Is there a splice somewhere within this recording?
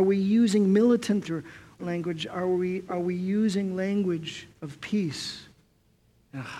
yes; 4 cuts; at 1.2 s, 1.8 s, 2.9 s, 4.5 s

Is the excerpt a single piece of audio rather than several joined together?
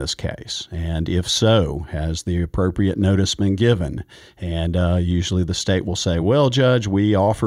yes; 0 cuts

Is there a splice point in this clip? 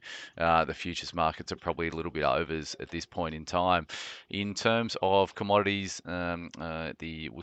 no; 0 cuts

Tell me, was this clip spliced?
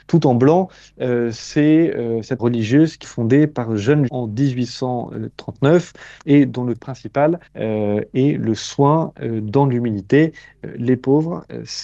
yes; 6 cuts; at 2.4 s, 3.0 s, 4.1 s, 6.2 s, 6.8 s, 7.5 s

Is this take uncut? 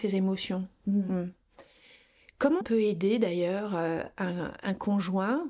no; 1 cut; at 2.6 s

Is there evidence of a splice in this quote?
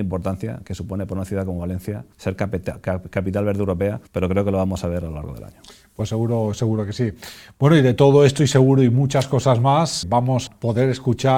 yes; 4 cuts; at 2.1 s, 4.1 s, 10.0 s, 10.5 s

